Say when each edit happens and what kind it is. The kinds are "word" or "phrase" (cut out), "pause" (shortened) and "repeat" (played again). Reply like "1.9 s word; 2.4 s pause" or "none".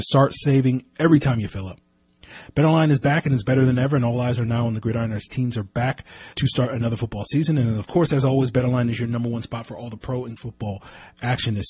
6.3 s pause; 10.4 s word